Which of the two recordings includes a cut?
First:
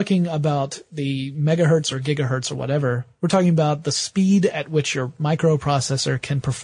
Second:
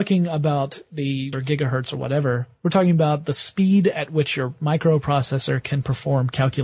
second; 1 cut; at 1.3 s

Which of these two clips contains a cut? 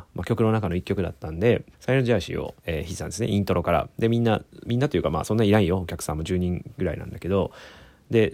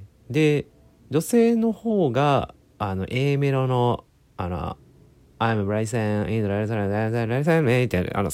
first; 2 cuts; at 1.7 s, 2.6 s

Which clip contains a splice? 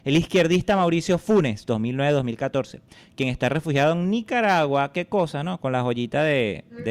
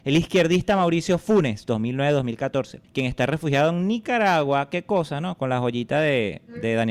second; 1 cut; at 2.8 s

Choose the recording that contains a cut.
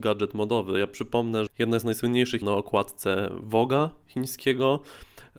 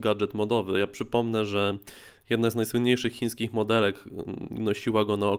first; 2 cuts; at 1.5 s, 2.4 s

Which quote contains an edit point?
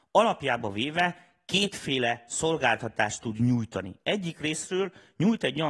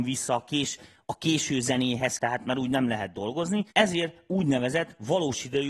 second; 2 cuts; at 2.2 s, 3.7 s

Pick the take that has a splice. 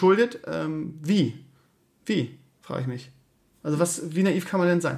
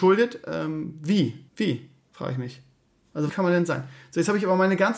second; 2 cuts; at 1.5 s, 3.3 s

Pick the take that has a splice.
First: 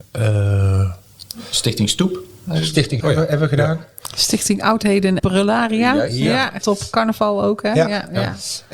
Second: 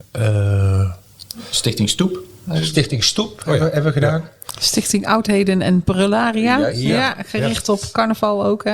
first; 3 cuts; at 3.0 s, 5.2 s, 6.6 s

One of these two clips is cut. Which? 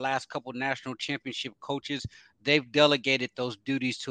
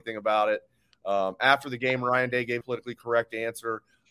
second; 1 cut; at 2.6 s

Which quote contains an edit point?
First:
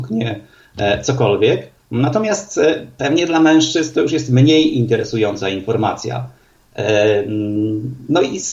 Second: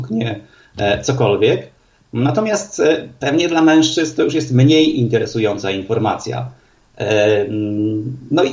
first; 1 cut; at 1.8 s

